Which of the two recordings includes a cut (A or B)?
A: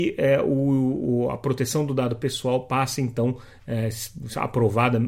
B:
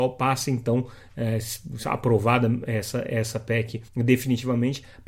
B